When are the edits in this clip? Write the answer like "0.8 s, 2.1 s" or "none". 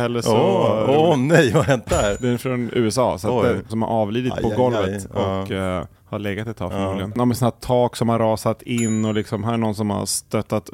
3.7 s, 6.0 s